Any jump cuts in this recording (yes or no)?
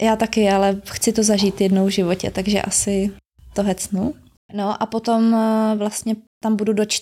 no